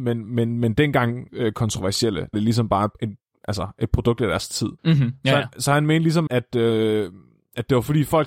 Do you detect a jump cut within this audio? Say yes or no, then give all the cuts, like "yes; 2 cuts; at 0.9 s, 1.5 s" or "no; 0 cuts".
yes; 5 cuts; at 1.3 s, 2.3 s, 2.9 s, 4.8 s, 6.3 s